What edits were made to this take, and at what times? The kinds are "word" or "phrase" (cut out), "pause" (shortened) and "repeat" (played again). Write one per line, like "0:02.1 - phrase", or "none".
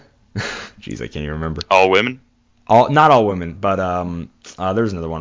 none